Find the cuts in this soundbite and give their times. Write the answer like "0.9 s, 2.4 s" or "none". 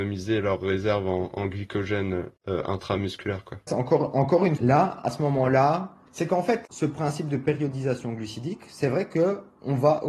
3.7 s, 4.6 s